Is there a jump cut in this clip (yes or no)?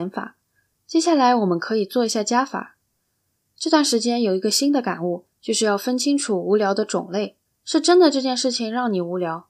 yes